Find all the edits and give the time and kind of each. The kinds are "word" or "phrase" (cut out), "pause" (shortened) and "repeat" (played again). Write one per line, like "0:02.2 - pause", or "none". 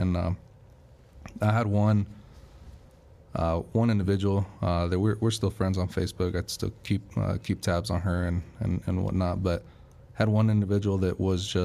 none